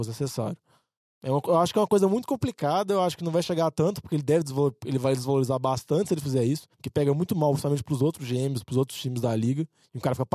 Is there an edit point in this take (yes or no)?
yes